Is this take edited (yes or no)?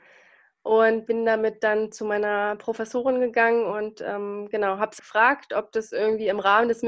yes